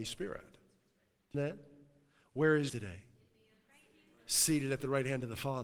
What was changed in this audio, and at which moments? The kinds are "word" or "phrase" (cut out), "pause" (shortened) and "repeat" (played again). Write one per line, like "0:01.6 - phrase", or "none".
0:01.3 - word
0:02.7 - word